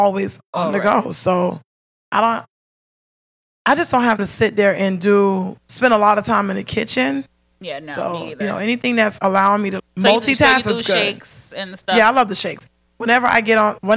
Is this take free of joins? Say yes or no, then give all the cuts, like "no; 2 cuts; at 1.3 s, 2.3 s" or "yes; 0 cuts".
no; 3 cuts; at 4.2 s, 9.2 s, 9.8 s